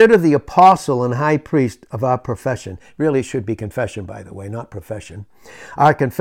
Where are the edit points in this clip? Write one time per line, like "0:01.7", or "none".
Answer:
none